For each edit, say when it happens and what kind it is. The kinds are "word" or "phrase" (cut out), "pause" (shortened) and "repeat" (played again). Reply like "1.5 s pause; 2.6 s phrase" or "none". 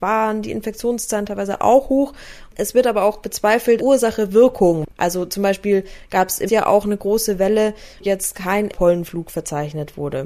3.8 s word; 6.5 s word; 8.0 s word; 8.7 s word